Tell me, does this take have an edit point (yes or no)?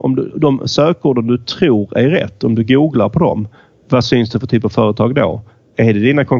no